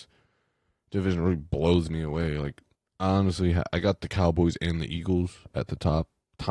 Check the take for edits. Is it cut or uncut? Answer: cut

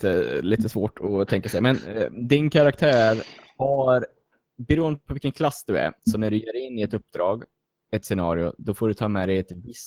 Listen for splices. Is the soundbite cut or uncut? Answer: uncut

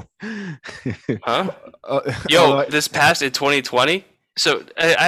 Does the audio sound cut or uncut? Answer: cut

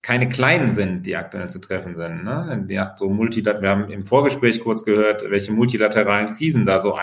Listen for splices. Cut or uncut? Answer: uncut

